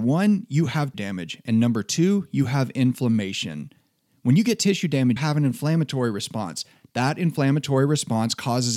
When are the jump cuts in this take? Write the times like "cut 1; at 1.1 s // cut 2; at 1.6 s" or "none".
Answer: cut 1; at 0.9 s // cut 2; at 5.2 s